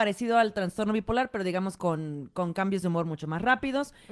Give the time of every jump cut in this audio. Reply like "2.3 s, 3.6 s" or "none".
none